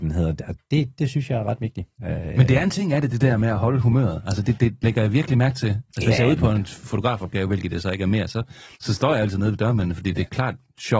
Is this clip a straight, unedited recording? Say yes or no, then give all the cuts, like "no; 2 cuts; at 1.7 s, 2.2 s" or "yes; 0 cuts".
no; 3 cuts; at 1.9 s, 4.4 s, 8.7 s